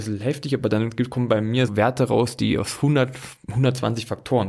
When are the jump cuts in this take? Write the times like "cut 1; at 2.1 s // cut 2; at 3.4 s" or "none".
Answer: cut 1; at 1.7 s